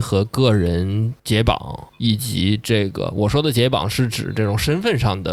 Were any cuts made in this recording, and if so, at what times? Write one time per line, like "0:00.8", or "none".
0:01.2
0:01.9